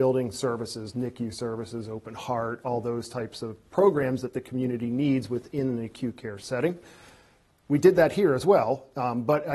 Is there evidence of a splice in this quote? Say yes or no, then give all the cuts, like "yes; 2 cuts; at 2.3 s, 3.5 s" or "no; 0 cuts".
no; 0 cuts